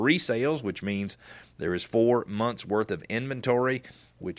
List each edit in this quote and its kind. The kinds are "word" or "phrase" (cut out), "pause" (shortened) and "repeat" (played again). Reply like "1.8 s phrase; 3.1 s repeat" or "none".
none